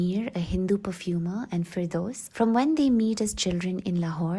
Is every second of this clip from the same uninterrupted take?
no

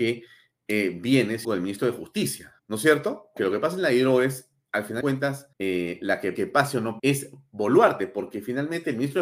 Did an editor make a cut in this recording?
yes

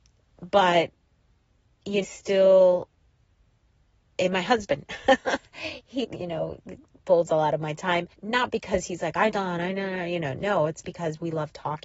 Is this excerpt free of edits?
no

